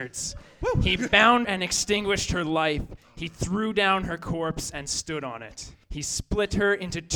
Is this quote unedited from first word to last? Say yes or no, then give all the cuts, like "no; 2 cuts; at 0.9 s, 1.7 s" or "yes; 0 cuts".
no; 2 cuts; at 1.4 s, 5.8 s